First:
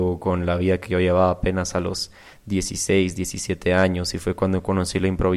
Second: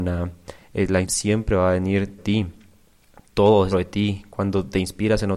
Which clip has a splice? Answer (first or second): second